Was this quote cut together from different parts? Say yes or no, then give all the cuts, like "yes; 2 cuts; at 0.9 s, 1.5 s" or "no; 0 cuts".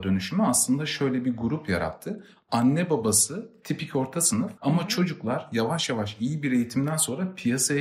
yes; 1 cut; at 4.6 s